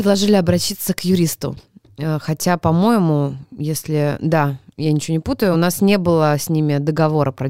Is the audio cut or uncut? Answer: uncut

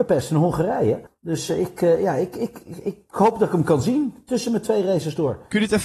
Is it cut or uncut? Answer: cut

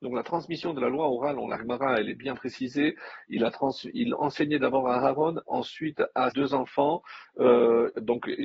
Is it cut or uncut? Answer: cut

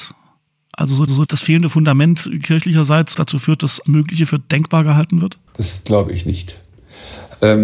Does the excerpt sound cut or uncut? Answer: cut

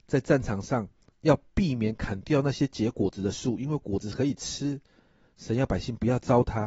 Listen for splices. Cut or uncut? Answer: uncut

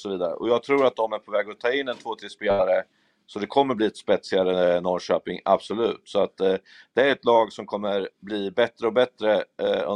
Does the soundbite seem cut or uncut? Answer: uncut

